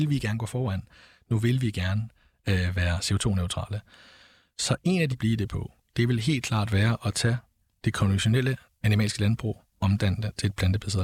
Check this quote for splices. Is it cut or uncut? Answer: cut